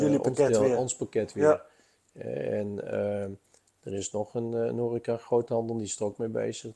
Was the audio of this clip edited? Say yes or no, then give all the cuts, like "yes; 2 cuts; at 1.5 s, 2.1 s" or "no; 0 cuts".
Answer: no; 0 cuts